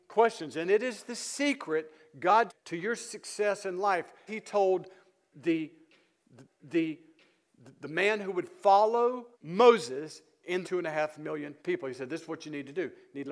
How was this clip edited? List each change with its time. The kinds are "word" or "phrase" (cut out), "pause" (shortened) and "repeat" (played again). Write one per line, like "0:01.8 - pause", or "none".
0:02.5 - word
0:04.3 - word
0:06.4 - repeat
0:09.3 - pause
0:10.6 - phrase
0:11.6 - pause